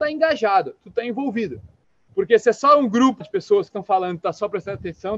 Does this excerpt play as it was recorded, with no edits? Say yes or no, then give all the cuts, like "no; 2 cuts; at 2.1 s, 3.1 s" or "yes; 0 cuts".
no; 2 cuts; at 3.2 s, 3.7 s